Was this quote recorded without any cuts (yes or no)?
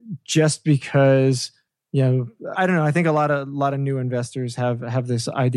no